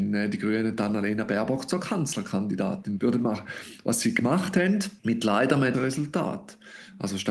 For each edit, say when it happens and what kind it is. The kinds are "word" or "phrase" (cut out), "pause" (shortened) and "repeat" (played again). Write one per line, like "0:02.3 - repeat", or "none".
0:05.0 - pause
0:05.7 - word